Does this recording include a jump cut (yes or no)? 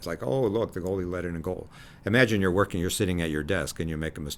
no